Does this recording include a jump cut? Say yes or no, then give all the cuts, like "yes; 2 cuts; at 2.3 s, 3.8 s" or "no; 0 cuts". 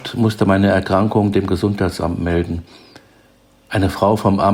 no; 0 cuts